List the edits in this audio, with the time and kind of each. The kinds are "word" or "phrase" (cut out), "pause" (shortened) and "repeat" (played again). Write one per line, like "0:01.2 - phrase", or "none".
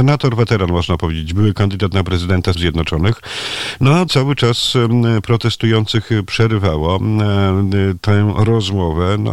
0:02.5 - word
0:04.1 - word